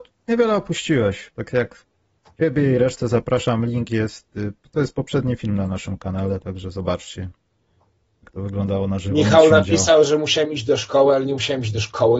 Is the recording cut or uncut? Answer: uncut